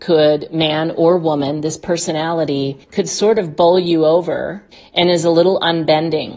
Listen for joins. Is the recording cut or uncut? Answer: cut